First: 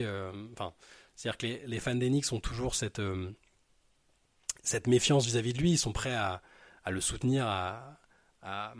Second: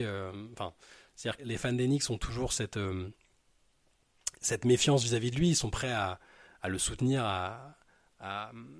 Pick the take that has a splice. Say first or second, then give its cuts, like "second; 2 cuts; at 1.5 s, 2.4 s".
second; 1 cut; at 1.4 s